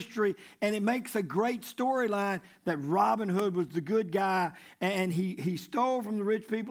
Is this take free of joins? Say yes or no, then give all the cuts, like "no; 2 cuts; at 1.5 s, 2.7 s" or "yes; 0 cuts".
yes; 0 cuts